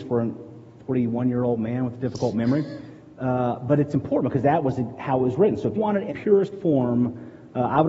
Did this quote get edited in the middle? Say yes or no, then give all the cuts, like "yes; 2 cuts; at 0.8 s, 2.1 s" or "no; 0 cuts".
yes; 2 cuts; at 5.8 s, 6.1 s